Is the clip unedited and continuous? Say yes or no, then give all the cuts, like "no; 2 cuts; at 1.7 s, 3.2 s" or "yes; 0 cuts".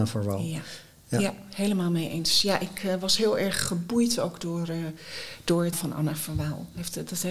no; 1 cut; at 5.7 s